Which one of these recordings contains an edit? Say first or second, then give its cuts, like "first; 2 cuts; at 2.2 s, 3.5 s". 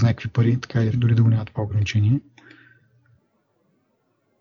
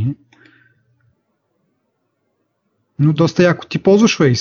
first; 1 cut; at 0.9 s